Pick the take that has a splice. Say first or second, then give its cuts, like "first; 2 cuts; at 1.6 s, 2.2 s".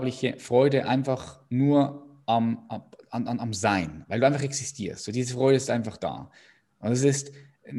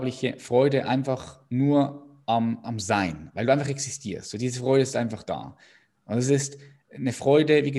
second; 1 cut; at 2.6 s